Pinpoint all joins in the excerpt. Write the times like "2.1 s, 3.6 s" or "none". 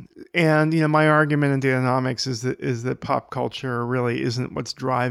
none